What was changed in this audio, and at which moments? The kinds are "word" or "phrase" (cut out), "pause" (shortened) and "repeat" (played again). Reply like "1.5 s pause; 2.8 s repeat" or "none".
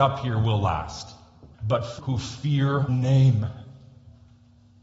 1.5 s pause; 2.0 s word; 2.9 s word